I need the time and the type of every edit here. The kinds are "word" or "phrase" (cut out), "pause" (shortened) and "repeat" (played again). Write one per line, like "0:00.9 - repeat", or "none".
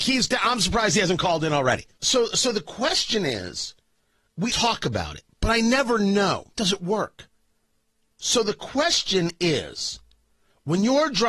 0:01.9 - pause
0:04.5 - word
0:06.5 - pause